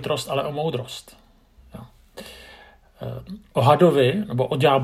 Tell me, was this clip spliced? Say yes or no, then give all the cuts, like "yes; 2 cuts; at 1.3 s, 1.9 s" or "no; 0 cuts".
no; 0 cuts